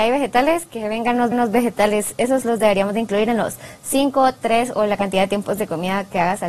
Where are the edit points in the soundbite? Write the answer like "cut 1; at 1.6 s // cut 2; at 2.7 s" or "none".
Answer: cut 1; at 1.3 s

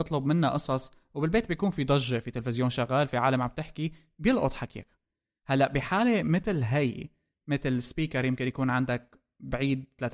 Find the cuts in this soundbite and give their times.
none

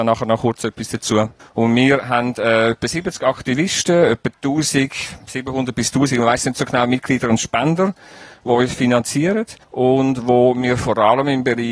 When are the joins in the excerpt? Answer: cut 1; at 1.4 s // cut 2; at 9.6 s

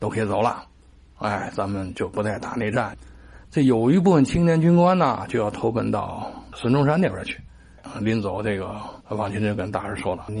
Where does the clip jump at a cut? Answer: cut 1; at 3.4 s // cut 2; at 9.0 s

